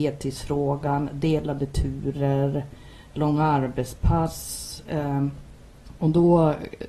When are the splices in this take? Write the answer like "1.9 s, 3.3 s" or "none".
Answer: none